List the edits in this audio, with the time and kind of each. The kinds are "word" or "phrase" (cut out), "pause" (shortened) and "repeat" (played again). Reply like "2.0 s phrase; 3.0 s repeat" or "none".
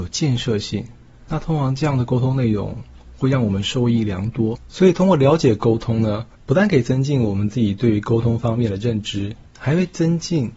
none